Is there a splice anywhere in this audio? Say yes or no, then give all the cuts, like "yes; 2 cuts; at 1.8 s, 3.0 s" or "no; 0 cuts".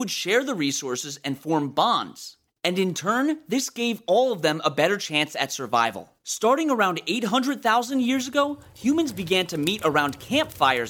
yes; 2 cuts; at 2.5 s, 6.2 s